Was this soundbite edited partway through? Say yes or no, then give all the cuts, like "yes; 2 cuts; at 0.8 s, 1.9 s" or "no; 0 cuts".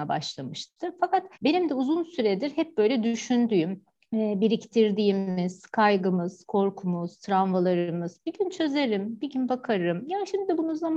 yes; 2 cuts; at 1.3 s, 3.9 s